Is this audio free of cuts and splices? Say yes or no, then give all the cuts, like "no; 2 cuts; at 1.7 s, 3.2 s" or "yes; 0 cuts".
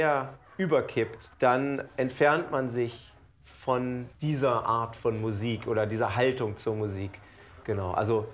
no; 2 cuts; at 1.3 s, 4.1 s